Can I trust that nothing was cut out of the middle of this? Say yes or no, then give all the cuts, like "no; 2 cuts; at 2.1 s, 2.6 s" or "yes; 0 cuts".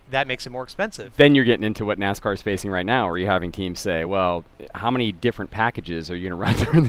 yes; 0 cuts